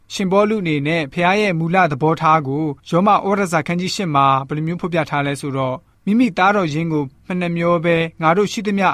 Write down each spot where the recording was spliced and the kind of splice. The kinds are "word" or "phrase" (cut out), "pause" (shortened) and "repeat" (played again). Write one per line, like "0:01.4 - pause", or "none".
0:02.8 - pause